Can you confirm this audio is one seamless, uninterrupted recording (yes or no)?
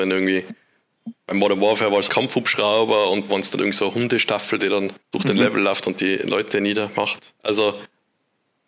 no